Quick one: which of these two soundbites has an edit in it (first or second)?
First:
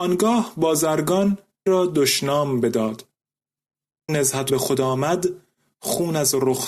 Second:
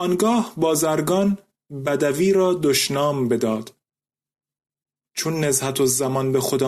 first